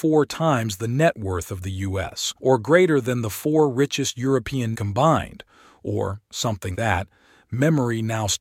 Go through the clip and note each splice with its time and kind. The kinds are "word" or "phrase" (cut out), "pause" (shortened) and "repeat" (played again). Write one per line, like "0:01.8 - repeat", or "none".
0:02.4 - pause
0:04.7 - word
0:06.7 - word